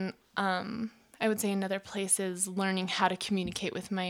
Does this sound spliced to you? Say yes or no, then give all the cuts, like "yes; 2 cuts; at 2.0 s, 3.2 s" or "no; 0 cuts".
no; 0 cuts